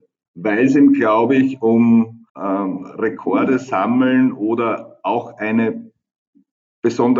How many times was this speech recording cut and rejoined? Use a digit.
1